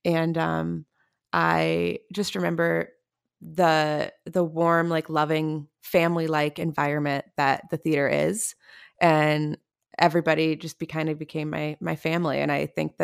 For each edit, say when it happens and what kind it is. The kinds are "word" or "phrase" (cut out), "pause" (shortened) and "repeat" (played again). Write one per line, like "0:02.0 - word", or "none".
none